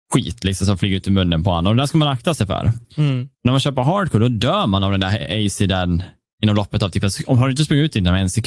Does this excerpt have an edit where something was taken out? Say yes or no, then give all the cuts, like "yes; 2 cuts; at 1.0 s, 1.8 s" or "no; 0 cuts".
yes; 1 cut; at 2.8 s